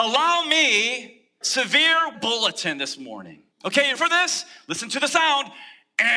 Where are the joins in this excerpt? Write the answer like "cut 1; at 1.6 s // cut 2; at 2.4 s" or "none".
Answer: cut 1; at 1.4 s // cut 2; at 2.1 s // cut 3; at 3.5 s // cut 4; at 3.9 s